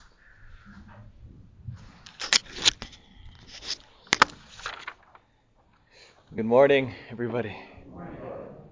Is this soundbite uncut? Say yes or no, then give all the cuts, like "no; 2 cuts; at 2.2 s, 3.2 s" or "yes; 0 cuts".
yes; 0 cuts